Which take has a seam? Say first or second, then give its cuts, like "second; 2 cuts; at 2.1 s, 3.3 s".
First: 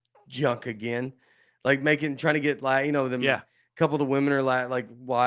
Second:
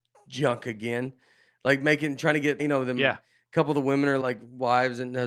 second; 2 cuts; at 2.6 s, 4.2 s